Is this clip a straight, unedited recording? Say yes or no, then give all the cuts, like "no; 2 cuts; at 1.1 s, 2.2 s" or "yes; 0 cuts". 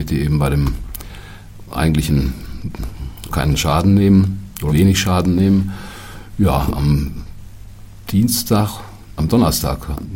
no; 3 cuts; at 3.3 s, 4.7 s, 9.2 s